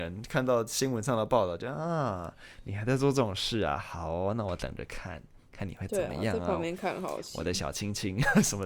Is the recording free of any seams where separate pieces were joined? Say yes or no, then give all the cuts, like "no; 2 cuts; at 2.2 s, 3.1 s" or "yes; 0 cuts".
yes; 0 cuts